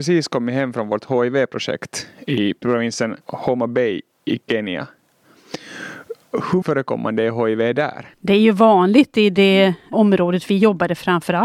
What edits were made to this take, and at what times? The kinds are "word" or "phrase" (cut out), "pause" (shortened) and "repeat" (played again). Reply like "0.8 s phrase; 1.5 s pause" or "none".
3.2 s pause; 6.6 s word; 8.1 s pause; 9.9 s word